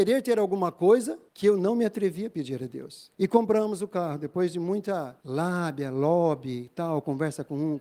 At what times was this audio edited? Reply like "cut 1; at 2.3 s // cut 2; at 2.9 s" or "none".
cut 1; at 1.3 s // cut 2; at 3.1 s